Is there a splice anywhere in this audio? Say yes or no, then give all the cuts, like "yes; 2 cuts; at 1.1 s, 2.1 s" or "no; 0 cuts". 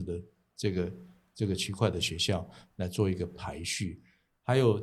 no; 0 cuts